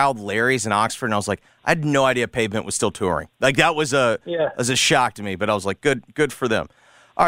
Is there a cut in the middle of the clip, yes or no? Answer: no